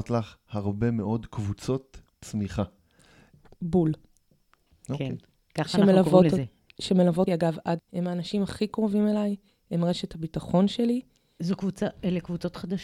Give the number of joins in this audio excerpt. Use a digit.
2